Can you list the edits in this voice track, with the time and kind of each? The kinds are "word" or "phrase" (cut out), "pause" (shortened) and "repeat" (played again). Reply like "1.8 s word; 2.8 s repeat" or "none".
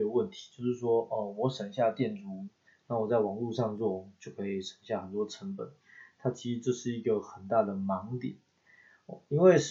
none